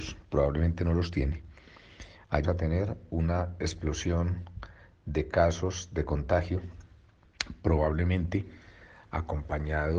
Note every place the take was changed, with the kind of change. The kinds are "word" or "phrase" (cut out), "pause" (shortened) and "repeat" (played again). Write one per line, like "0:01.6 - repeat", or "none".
0:02.4 - word

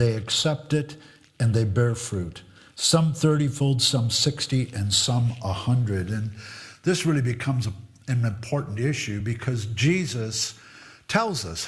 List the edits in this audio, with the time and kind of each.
none

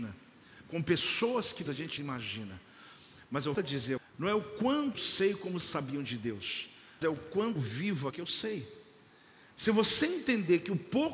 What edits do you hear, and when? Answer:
0:01.7 - word
0:02.0 - word
0:03.5 - word
0:04.0 - word
0:04.9 - word
0:05.6 - word
0:07.0 - word
0:07.6 - word
0:08.1 - word

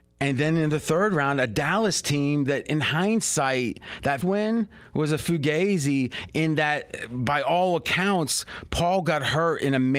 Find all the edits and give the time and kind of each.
0:04.2 - word

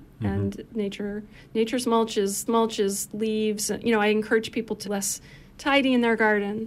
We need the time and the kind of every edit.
0:02.5 - repeat
0:04.8 - word

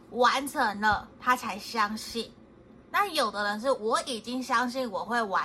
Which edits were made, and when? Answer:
0:02.8 - pause

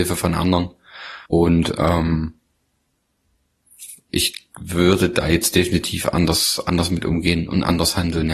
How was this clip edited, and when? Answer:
0:01.3 - pause

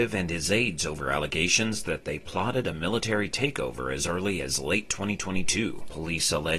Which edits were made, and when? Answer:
none

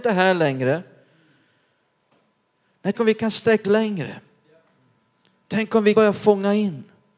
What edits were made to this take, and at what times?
0:02.9 - word
0:03.6 - word
0:05.9 - word

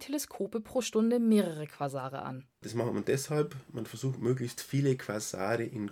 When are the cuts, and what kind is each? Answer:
0:02.5 - pause

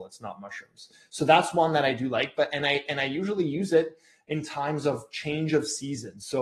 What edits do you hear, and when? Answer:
none

